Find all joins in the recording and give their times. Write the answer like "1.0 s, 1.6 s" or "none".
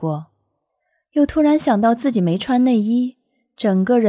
none